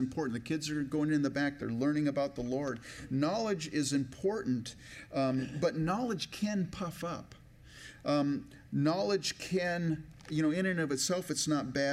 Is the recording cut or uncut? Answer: uncut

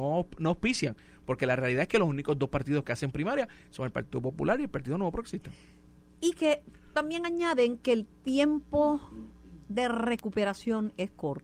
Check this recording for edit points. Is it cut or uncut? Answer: uncut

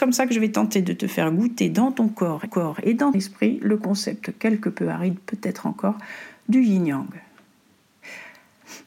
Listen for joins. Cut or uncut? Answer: cut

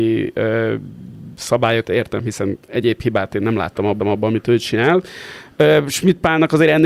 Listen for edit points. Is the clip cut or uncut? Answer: cut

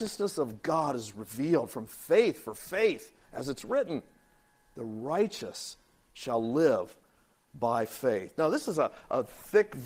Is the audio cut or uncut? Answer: uncut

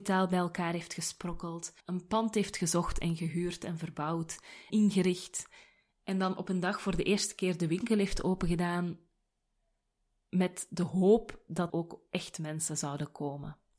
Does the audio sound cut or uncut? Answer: cut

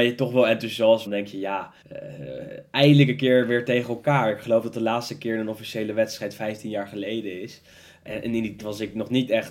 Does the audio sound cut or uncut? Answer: cut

